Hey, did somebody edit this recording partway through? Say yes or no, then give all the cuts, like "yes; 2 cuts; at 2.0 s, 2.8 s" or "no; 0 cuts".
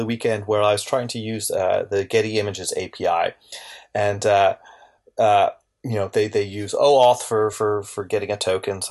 no; 0 cuts